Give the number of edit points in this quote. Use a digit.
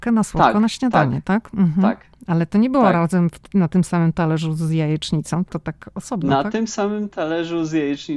1